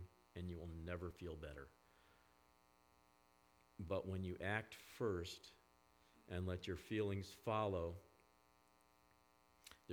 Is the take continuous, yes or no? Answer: yes